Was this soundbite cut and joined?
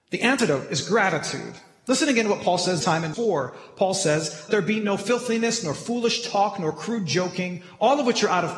yes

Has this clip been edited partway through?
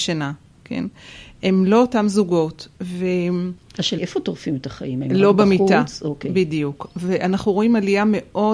yes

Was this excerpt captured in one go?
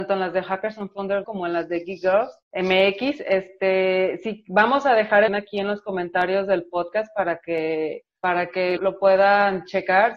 no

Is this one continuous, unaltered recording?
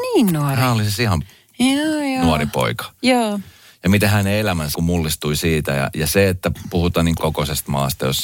no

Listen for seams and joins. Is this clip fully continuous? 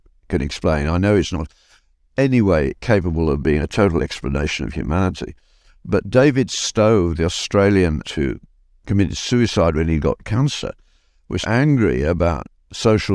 no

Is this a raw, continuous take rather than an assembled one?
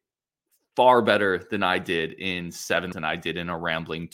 no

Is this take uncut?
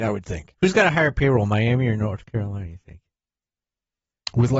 yes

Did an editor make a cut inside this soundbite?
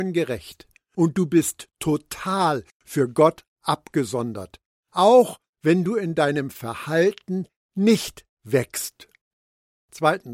no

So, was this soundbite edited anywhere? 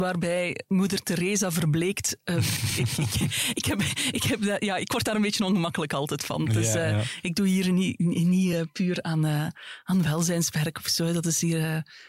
no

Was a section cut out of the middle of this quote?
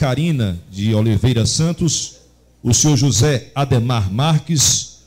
no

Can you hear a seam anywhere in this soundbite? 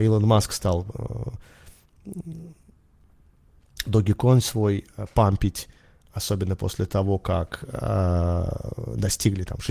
no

